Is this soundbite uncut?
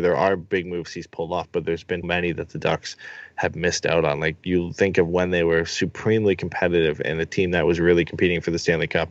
no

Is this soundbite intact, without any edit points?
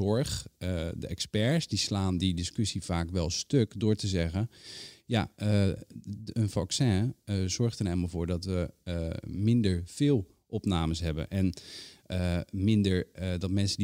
yes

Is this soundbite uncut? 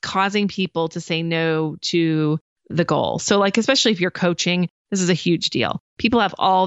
yes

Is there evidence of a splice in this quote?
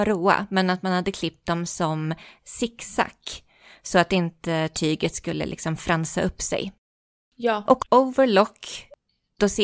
no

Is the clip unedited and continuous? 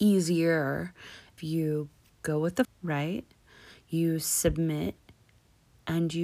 no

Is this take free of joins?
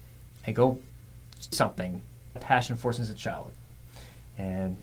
no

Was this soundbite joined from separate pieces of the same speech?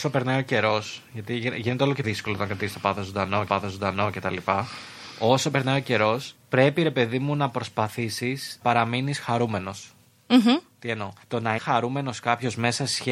yes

